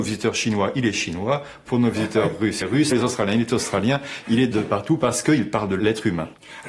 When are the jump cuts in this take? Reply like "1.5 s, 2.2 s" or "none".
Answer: 2.6 s, 2.9 s